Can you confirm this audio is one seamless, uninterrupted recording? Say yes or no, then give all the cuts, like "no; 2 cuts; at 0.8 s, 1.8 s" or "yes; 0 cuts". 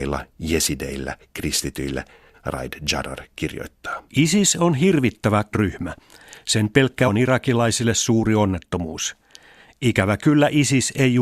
no; 4 cuts; at 2.3 s, 4.1 s, 5.5 s, 7.1 s